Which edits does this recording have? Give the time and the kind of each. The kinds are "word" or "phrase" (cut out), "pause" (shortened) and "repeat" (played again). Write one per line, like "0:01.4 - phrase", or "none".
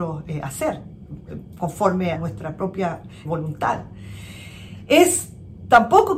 0:02.1 - word
0:03.2 - word